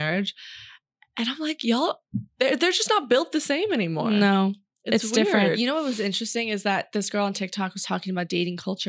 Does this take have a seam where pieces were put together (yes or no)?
no